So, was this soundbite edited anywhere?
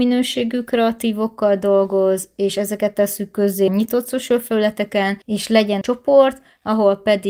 yes; 3 cuts; at 3.7 s, 5.2 s, 5.8 s

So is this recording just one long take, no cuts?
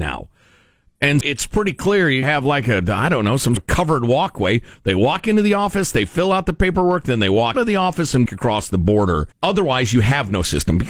no; 6 cuts; at 1.2 s, 2.2 s, 3.6 s, 7.5 s, 8.3 s, 9.3 s

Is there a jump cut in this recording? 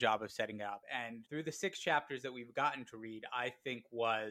no; 0 cuts

